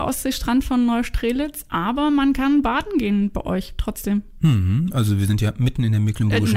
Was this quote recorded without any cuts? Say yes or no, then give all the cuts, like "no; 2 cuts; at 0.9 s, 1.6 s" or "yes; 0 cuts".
yes; 0 cuts